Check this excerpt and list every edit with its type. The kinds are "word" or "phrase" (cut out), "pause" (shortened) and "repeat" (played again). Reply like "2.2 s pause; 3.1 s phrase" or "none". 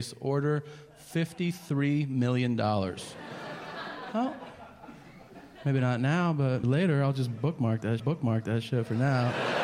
6.6 s word; 8.0 s repeat